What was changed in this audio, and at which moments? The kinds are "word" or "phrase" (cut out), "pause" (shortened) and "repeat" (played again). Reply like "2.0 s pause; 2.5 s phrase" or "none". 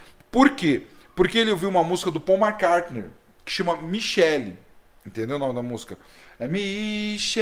none